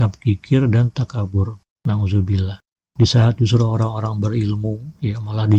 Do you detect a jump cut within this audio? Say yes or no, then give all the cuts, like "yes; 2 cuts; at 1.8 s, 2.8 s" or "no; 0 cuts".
no; 0 cuts